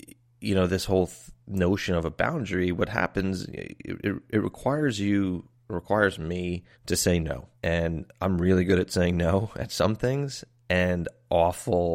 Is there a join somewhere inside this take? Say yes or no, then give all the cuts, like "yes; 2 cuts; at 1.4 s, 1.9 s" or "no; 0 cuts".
yes; 4 cuts; at 1.4 s, 5.6 s, 6.7 s, 7.5 s